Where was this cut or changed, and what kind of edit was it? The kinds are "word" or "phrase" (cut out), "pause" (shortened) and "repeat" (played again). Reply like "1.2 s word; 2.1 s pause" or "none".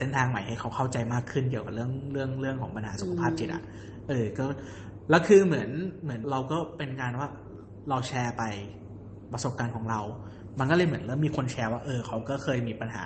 6.2 s phrase